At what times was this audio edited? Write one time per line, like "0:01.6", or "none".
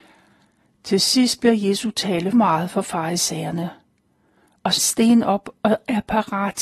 0:02.3
0:04.8